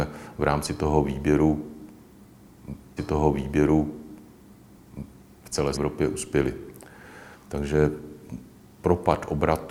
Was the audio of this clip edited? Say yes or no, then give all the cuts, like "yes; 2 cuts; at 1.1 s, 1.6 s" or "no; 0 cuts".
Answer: yes; 3 cuts; at 3.0 s, 5.7 s, 7.3 s